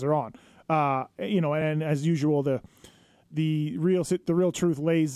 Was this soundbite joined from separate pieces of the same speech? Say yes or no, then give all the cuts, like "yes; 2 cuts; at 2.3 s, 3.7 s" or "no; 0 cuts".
no; 0 cuts